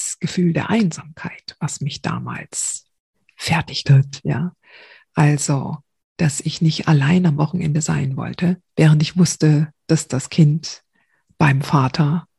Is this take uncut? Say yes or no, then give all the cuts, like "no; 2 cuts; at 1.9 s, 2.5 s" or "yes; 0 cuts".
no; 2 cuts; at 3.8 s, 8.7 s